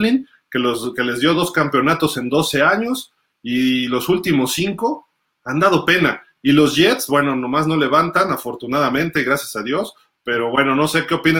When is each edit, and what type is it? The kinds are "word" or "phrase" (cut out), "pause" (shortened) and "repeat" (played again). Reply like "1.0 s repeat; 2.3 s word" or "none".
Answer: none